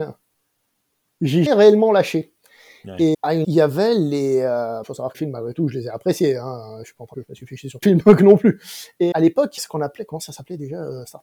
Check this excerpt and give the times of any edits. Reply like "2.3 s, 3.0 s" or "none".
1.5 s, 3.1 s, 3.4 s, 4.8 s, 5.1 s, 7.1 s, 7.8 s, 9.1 s, 9.6 s